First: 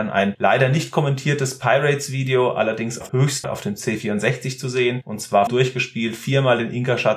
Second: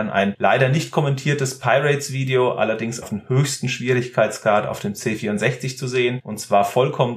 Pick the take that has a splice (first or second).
first